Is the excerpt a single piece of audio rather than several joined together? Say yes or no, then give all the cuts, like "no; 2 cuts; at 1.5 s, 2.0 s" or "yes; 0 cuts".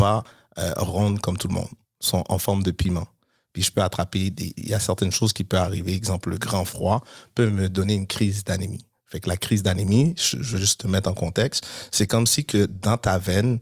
yes; 0 cuts